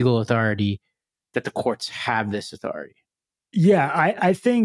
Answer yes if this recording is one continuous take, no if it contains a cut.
yes